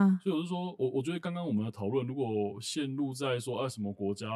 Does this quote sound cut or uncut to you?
uncut